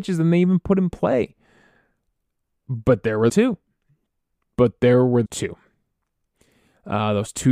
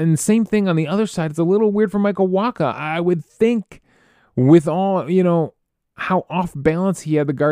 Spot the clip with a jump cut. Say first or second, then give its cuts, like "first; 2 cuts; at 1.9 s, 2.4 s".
first; 2 cuts; at 3.3 s, 5.3 s